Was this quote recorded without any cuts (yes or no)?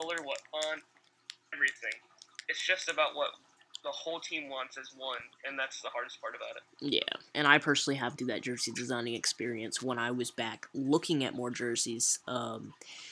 no